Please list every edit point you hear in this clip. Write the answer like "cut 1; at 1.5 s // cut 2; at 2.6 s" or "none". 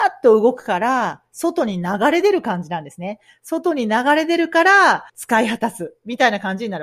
cut 1; at 5.1 s